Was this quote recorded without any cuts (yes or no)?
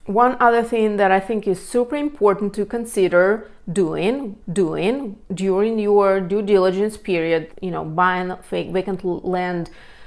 no